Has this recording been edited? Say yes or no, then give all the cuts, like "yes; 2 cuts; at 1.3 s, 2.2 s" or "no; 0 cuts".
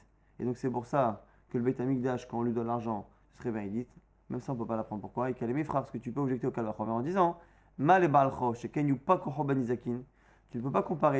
no; 0 cuts